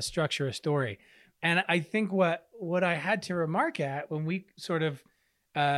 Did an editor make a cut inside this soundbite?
no; 0 cuts

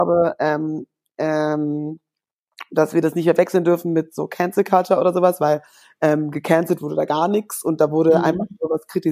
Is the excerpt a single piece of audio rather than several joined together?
yes; 0 cuts

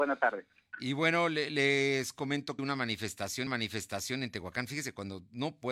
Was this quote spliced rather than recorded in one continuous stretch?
yes; 2 cuts; at 2.6 s, 3.5 s

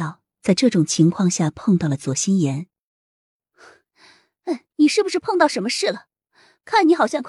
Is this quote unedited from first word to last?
no; 1 cut; at 4.7 s

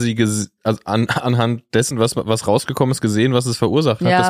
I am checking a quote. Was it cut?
no; 0 cuts

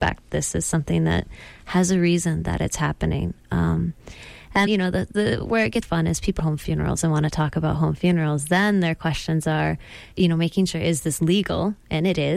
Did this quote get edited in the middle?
yes; 4 cuts; at 4.7 s, 5.8 s, 6.4 s, 10.1 s

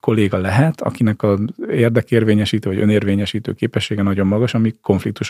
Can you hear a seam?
no; 0 cuts

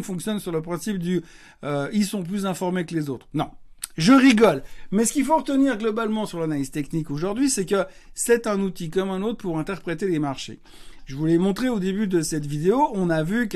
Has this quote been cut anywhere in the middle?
no; 0 cuts

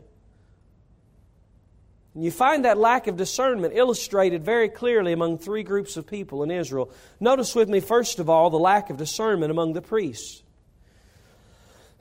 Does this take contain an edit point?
no; 0 cuts

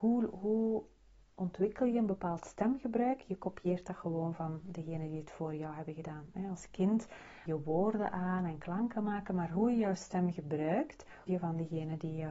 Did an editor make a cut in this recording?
yes; 2 cuts; at 7.5 s, 11.3 s

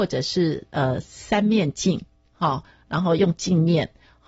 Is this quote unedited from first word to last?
yes; 0 cuts

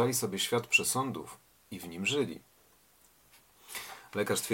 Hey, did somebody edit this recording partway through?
no; 0 cuts

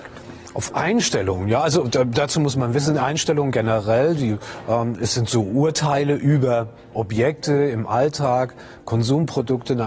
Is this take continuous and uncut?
yes; 0 cuts

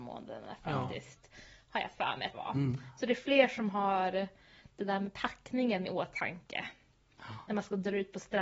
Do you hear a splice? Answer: yes; 1 cut; at 2.3 s

